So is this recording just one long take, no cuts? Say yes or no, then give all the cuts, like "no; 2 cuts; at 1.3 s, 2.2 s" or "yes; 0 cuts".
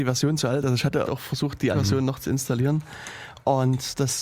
no; 2 cuts; at 1.0 s, 1.7 s